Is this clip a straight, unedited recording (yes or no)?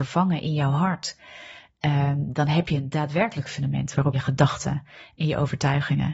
no